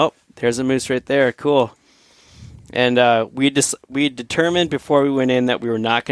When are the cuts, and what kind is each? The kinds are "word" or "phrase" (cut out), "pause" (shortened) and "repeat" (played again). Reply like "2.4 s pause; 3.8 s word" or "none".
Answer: none